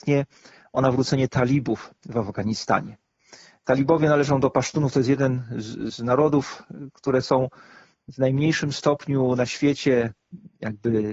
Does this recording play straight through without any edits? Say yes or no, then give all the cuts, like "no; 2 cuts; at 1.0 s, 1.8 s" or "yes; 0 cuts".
yes; 0 cuts